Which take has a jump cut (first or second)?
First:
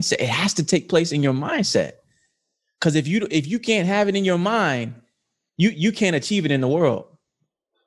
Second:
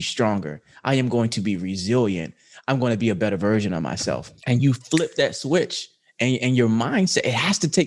second